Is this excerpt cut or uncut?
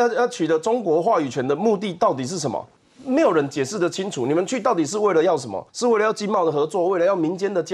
cut